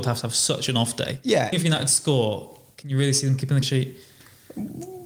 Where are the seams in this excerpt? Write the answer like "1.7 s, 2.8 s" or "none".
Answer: 1.5 s, 3.6 s